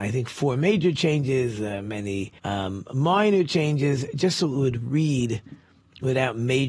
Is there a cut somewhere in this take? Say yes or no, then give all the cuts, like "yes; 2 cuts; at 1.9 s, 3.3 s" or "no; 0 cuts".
yes; 1 cut; at 2.4 s